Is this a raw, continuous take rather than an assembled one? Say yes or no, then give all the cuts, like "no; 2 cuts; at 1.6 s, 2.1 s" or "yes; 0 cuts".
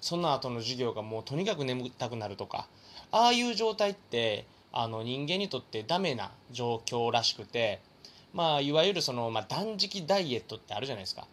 no; 1 cut; at 6.4 s